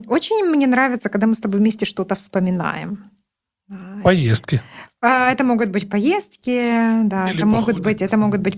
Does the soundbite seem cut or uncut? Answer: uncut